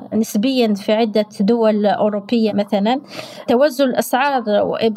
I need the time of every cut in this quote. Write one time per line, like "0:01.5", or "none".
none

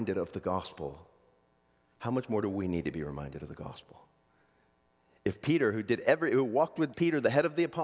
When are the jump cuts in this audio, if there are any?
0:06.9

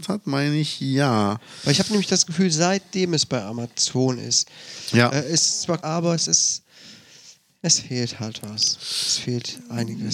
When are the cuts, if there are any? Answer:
0:05.8

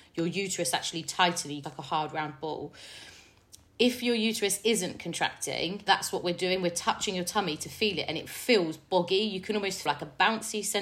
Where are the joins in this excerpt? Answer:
0:01.6
0:05.9
0:09.9

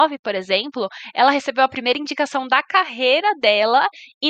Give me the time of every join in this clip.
none

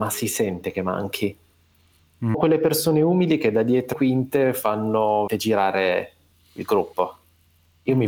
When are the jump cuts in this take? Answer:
0:02.3
0:03.9
0:05.3

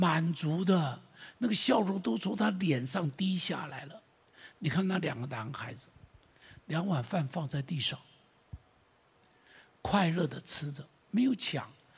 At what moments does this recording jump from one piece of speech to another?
none

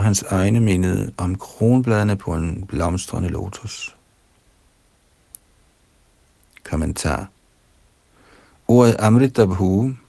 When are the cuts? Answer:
none

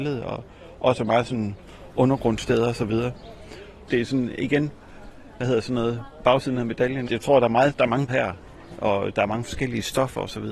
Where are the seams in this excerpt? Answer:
0:06.2
0:07.0
0:08.1

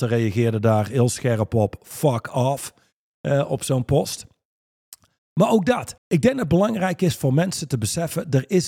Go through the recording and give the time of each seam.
0:06.0

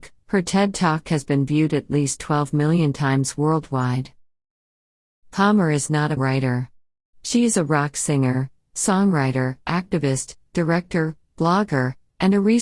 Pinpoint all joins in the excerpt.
0:06.2

